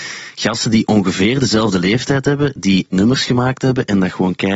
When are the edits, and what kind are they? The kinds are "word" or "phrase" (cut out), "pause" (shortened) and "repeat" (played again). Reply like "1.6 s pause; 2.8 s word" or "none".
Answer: 2.9 s word